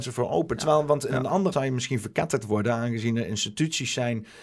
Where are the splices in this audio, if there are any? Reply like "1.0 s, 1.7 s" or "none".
1.5 s

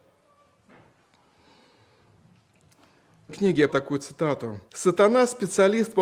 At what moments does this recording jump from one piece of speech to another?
3.3 s, 3.7 s, 4.7 s

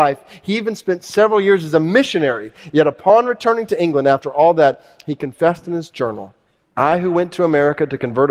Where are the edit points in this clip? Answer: 6.6 s

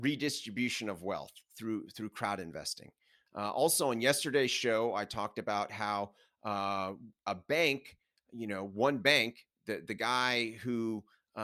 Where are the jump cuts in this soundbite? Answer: none

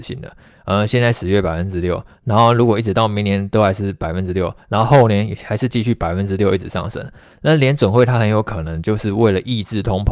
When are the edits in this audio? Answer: none

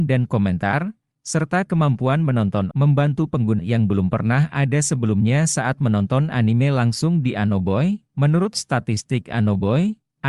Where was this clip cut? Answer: 2.7 s, 3.6 s

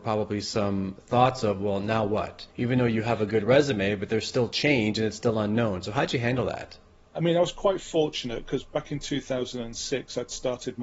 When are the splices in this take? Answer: 2.5 s, 7.1 s

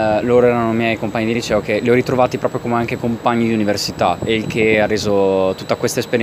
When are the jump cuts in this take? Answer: none

